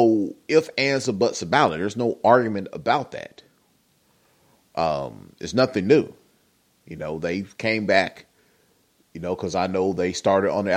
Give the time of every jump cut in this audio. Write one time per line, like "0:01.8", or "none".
none